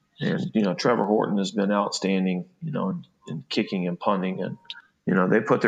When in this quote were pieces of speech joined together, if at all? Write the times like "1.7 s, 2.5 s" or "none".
none